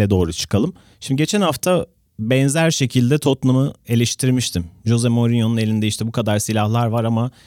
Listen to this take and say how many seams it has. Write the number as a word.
zero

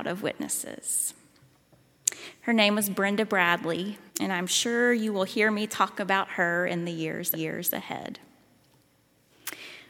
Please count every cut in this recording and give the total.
two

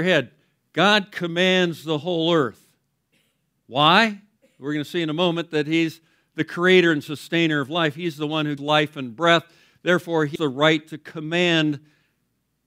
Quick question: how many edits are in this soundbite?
two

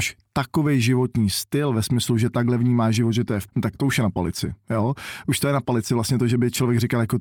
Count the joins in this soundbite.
one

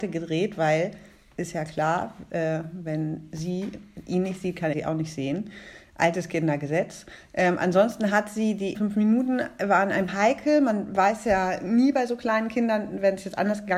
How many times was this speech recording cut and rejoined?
three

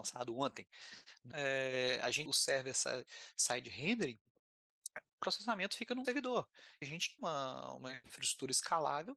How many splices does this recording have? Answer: six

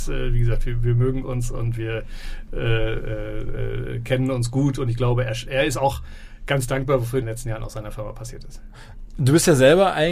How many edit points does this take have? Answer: one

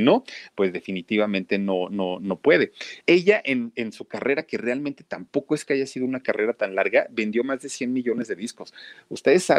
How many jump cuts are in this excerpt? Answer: one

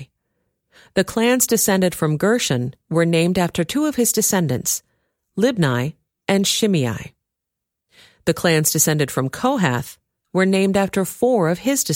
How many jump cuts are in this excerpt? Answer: zero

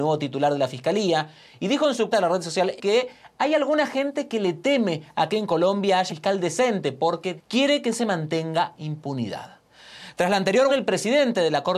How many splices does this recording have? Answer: six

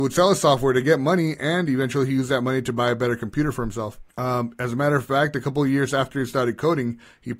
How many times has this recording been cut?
one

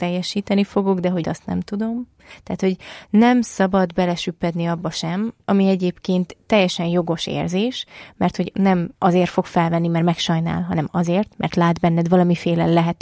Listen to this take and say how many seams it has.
two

